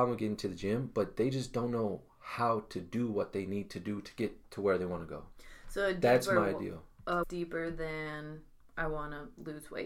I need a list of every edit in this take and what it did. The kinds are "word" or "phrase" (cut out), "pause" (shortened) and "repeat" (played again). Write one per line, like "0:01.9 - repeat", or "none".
0:07.2 - phrase